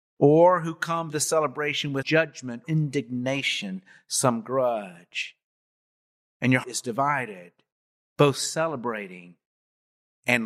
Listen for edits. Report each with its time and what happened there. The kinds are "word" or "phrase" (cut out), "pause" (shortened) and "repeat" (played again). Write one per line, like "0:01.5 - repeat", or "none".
0:01.1 - word
0:02.0 - word
0:02.6 - word
0:06.6 - word